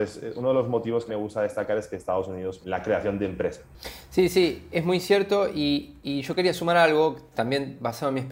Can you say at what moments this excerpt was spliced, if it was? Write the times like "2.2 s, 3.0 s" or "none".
1.1 s, 2.6 s